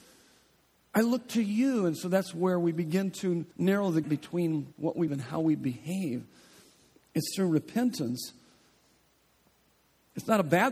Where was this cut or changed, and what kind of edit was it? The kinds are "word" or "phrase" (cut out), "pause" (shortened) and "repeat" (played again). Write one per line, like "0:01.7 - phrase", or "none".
0:03.5 - pause
0:04.0 - word
0:04.7 - pause
0:05.1 - word

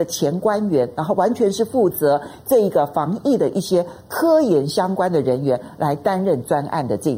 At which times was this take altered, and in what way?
none

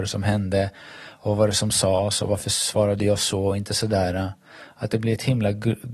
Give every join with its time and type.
none

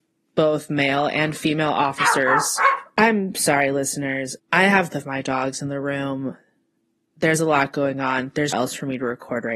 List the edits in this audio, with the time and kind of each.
0:04.9 - word
0:08.5 - word

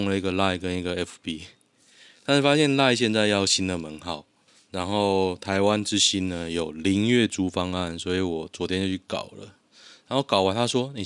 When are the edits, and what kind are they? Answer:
none

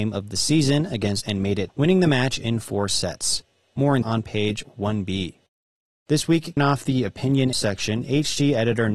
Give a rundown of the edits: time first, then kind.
0:01.2 - word
0:01.7 - word
0:04.0 - word
0:06.6 - word
0:07.5 - word

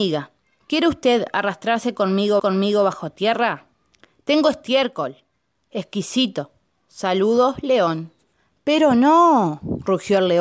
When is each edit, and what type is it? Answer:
0:02.4 - repeat

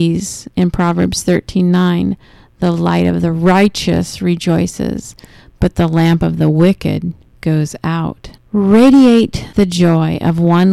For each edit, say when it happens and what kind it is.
none

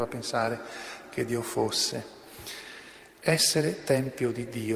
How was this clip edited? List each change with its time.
none

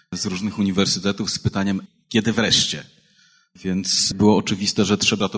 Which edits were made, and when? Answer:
none

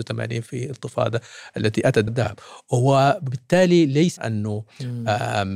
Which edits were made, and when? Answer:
0:02.1 - word
0:04.2 - word

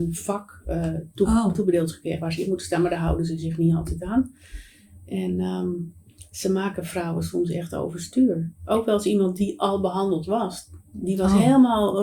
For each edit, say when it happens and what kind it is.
none

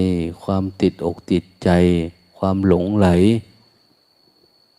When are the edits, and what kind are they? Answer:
none

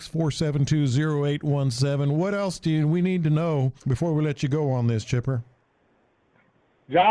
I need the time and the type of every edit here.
0:03.8 - pause

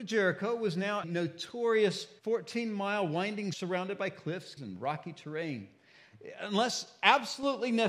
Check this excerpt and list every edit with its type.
0:01.0 - word
0:02.2 - pause
0:03.5 - word
0:04.6 - word

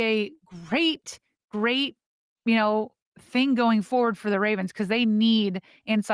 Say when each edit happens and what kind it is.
none

